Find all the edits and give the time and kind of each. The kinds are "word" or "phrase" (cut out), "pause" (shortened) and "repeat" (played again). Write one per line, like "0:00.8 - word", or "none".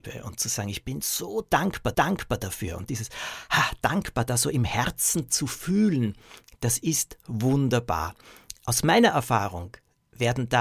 0:01.9 - repeat